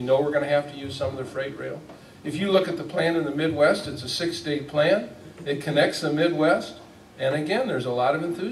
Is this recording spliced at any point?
no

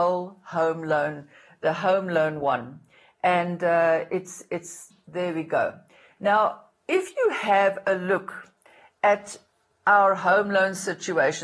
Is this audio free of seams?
no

